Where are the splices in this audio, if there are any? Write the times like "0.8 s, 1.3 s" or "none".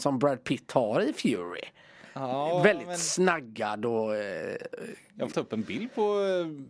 5.3 s